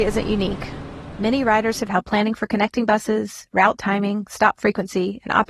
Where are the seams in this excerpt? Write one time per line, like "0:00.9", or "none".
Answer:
0:01.9